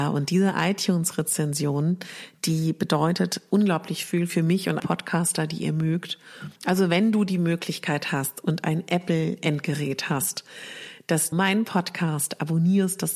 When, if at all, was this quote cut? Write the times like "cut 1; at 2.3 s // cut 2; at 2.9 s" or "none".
cut 1; at 4.8 s // cut 2; at 6.6 s // cut 3; at 11.3 s